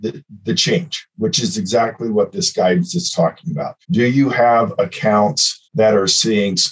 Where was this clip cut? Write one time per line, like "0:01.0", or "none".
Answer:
0:03.8
0:05.6

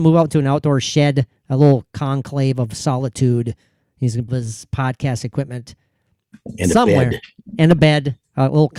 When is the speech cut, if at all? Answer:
0:04.3

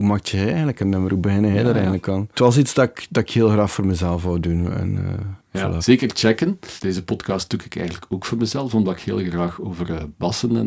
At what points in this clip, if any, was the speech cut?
0:05.4

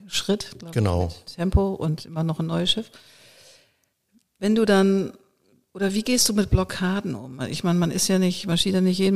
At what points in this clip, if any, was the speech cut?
0:01.2

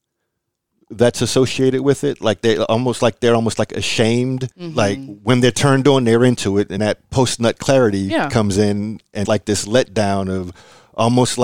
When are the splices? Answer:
0:04.5
0:06.8
0:09.2

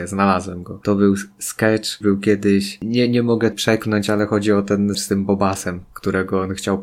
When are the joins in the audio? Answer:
0:02.0
0:03.5
0:04.9

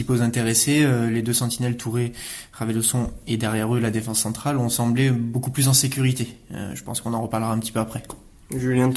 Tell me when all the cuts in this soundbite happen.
none

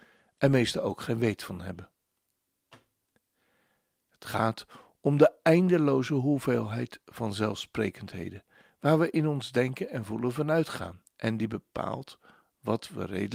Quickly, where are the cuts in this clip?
0:11.1

